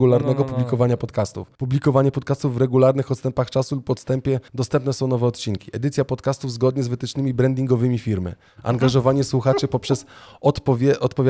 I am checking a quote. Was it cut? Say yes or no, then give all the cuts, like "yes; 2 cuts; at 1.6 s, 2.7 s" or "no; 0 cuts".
yes; 2 cuts; at 1.5 s, 4.5 s